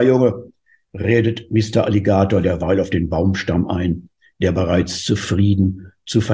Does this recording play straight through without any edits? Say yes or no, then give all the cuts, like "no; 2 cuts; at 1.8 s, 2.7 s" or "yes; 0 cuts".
yes; 0 cuts